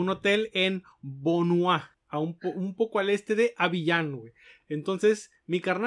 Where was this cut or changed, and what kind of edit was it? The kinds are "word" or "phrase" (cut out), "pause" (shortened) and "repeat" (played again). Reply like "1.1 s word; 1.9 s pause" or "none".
1.9 s pause